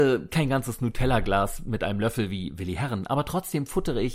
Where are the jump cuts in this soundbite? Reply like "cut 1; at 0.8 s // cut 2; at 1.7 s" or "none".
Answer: none